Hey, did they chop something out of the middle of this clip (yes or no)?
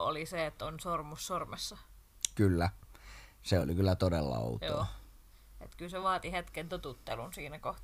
no